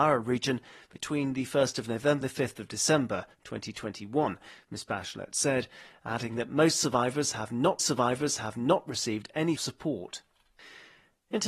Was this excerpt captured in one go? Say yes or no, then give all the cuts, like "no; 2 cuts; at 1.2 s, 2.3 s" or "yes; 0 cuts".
no; 3 cuts; at 2.2 s, 7.8 s, 9.6 s